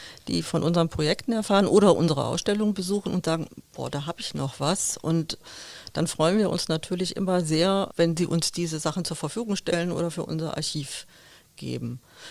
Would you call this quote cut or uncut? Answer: uncut